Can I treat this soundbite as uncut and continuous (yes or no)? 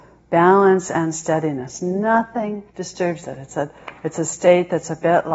no